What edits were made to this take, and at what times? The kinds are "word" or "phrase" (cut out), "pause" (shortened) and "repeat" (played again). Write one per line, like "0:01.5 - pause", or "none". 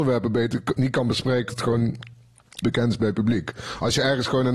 0:01.5 - word
0:02.6 - word